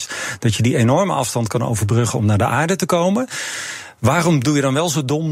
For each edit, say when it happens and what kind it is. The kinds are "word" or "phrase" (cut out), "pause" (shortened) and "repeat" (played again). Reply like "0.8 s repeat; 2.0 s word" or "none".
none